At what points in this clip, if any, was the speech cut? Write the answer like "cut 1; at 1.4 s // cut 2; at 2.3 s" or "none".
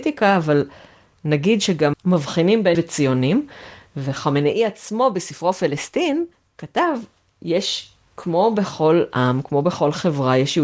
cut 1; at 1.9 s // cut 2; at 2.7 s // cut 3; at 6.3 s